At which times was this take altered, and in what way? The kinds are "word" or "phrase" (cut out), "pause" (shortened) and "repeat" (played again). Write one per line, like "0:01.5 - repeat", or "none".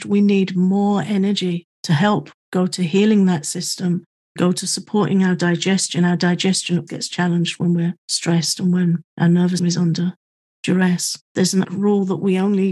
0:01.7 - pause
0:02.4 - pause
0:04.4 - word
0:06.9 - word
0:08.0 - pause
0:09.1 - pause
0:09.6 - word
0:11.3 - pause
0:11.6 - word